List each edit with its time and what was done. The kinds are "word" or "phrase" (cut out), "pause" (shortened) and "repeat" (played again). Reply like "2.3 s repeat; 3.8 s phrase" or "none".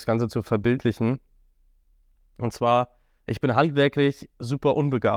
none